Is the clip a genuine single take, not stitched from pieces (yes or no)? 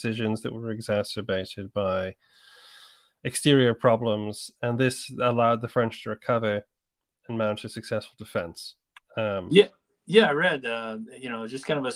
yes